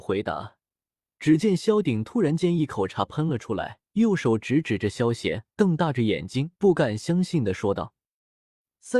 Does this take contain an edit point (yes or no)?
yes